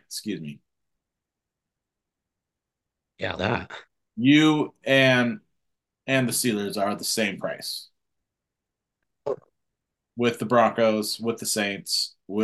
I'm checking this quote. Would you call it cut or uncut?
cut